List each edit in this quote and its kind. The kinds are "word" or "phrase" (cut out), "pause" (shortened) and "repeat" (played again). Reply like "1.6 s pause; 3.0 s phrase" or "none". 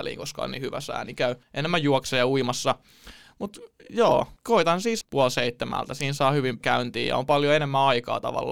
1.4 s pause; 4.4 s pause; 5.0 s phrase; 6.6 s word